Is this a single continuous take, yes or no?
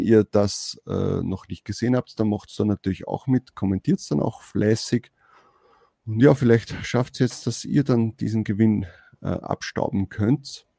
yes